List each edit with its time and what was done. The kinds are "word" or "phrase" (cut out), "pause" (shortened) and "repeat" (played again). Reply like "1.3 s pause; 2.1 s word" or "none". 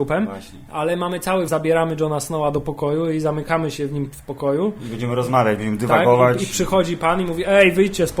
1.5 s phrase